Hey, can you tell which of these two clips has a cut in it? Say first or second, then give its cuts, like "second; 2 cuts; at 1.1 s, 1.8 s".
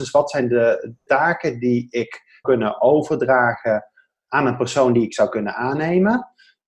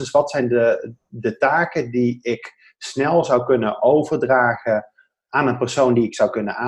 first; 2 cuts; at 1.1 s, 2.4 s